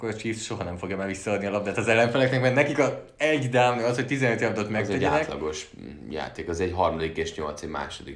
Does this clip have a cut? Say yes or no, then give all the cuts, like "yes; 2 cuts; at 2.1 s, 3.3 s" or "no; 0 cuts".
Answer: no; 0 cuts